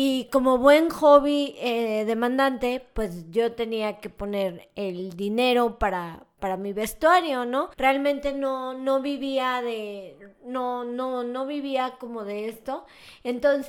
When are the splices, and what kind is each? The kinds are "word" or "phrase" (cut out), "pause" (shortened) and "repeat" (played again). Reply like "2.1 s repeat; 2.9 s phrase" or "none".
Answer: 7.7 s pause